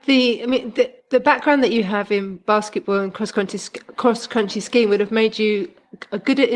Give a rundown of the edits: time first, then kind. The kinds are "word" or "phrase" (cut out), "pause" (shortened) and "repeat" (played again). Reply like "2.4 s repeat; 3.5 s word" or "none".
1.0 s pause